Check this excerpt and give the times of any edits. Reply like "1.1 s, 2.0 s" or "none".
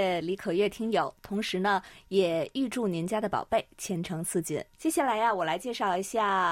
4.7 s